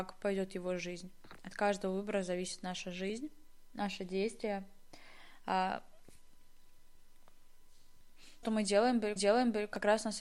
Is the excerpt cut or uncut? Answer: cut